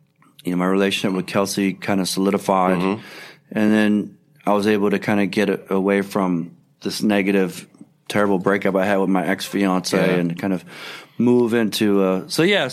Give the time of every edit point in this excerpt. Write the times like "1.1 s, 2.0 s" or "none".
none